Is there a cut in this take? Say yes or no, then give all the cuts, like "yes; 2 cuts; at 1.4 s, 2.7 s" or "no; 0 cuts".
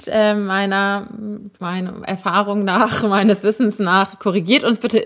yes; 1 cut; at 1.5 s